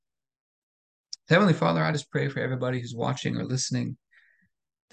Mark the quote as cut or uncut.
uncut